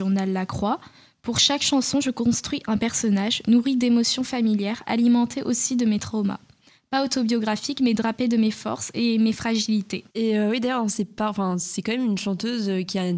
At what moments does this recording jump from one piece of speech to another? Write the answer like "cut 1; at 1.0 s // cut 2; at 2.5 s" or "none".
cut 1; at 10.1 s